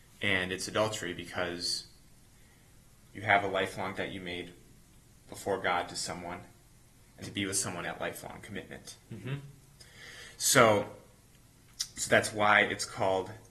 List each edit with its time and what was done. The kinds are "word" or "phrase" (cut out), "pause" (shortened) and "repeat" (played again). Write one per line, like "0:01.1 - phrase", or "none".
0:03.9 - word
0:07.2 - word
0:07.8 - phrase